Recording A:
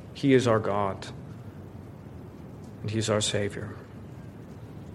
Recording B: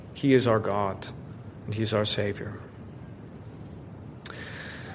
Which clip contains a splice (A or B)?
B